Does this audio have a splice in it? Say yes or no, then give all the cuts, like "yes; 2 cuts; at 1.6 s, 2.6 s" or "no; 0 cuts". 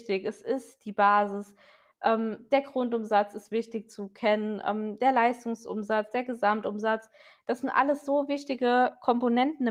no; 0 cuts